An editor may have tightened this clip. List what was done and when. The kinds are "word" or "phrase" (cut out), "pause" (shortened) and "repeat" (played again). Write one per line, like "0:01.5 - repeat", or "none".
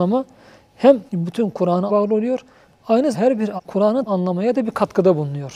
0:01.1 - pause
0:01.9 - word
0:03.1 - word
0:03.6 - word
0:04.1 - word